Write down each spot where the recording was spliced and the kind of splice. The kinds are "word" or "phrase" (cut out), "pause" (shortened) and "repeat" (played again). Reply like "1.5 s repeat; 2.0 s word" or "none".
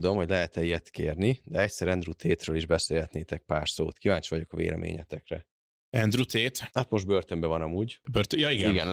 none